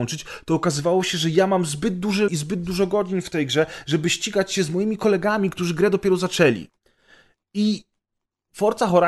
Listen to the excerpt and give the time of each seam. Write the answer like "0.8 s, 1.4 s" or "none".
2.3 s